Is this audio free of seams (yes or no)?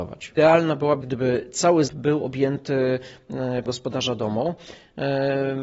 no